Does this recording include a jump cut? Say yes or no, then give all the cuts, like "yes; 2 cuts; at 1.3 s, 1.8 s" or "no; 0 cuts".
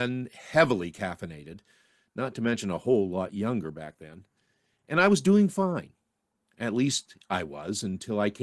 no; 0 cuts